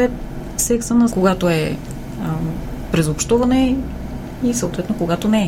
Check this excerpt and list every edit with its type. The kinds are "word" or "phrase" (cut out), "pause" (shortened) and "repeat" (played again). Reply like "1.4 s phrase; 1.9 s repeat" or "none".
1.1 s phrase